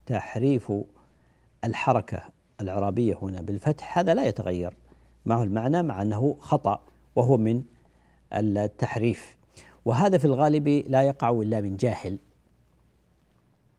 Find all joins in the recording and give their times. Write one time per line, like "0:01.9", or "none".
none